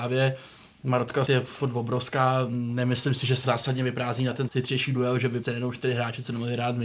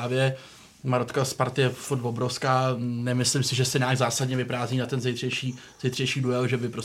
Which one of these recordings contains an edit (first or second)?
first